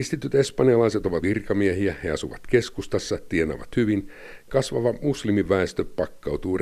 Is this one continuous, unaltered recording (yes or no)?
no